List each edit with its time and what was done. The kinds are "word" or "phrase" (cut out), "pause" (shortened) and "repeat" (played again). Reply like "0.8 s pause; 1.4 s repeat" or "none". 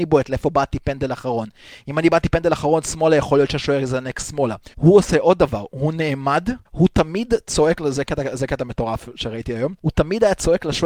4.7 s pause; 6.6 s pause; 9.8 s pause